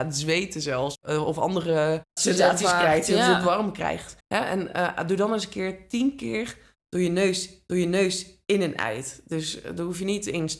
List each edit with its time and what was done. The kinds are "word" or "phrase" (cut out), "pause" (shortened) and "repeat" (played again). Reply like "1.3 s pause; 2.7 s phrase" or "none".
2.2 s word; 4.2 s pause; 7.7 s repeat